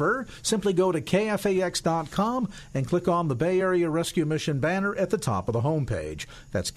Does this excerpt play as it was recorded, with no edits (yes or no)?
yes